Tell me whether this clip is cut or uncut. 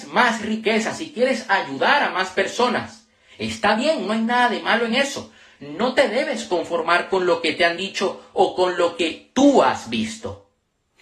uncut